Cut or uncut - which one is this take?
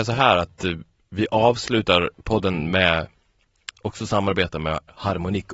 cut